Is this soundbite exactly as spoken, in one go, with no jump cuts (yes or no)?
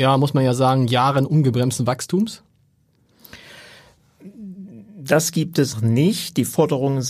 no